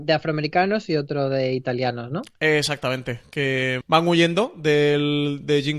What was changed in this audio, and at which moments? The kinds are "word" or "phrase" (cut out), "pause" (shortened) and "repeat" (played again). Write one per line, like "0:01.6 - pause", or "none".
0:03.8 - word